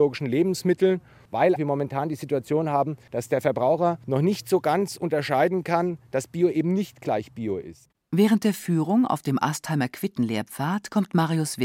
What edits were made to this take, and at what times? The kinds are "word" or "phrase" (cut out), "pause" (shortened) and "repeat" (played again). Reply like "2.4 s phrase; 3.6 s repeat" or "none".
1.6 s word